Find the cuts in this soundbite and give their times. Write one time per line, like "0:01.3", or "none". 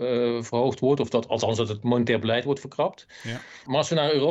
none